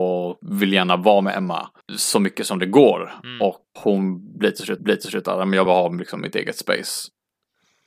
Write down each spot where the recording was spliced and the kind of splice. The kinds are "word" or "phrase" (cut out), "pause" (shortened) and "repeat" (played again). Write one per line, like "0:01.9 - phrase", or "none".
0:01.8 - pause
0:03.8 - word
0:04.8 - repeat
0:05.7 - word